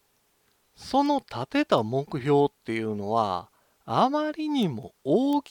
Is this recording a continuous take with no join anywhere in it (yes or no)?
yes